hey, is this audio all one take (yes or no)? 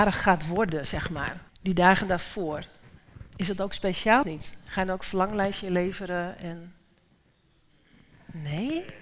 no